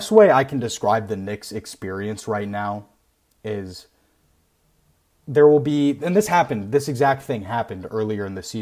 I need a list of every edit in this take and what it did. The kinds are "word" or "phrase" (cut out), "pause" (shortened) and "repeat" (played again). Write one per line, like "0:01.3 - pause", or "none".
none